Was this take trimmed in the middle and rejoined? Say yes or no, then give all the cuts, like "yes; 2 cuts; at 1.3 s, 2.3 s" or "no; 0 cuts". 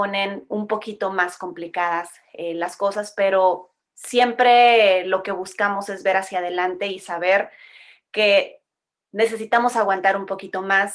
no; 0 cuts